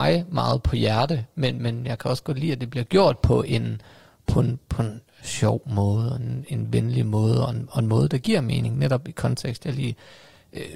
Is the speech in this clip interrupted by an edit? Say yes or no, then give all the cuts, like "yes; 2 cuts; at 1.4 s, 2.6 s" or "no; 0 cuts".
no; 0 cuts